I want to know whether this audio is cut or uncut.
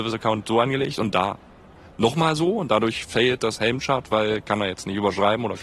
uncut